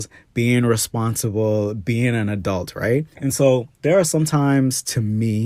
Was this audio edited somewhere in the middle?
yes; 2 cuts; at 3.1 s, 3.7 s

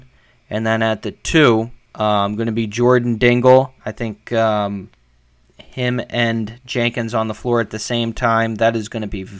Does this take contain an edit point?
yes; 2 cuts; at 1.8 s, 3.8 s

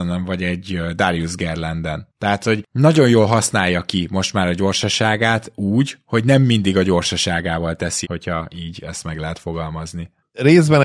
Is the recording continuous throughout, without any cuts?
no; 1 cut; at 8.0 s

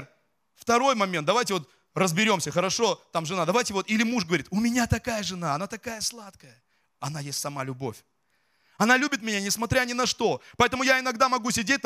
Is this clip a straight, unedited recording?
yes; 0 cuts

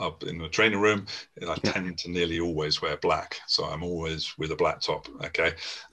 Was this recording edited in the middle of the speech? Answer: no; 0 cuts

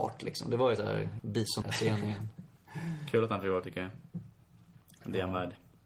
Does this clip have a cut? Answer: yes; 3 cuts; at 1.2 s, 1.6 s, 3.6 s

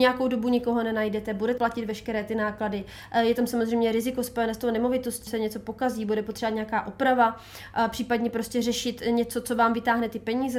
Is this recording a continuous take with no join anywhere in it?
no; 2 cuts; at 1.6 s, 5.3 s

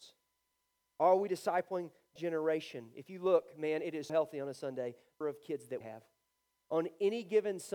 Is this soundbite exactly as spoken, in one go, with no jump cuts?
no; 4 cuts; at 2.2 s, 4.1 s, 5.2 s, 5.8 s

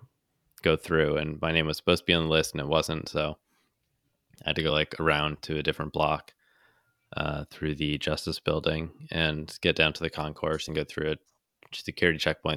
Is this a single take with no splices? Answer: yes; 0 cuts

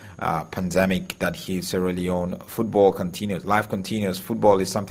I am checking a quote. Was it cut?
no; 0 cuts

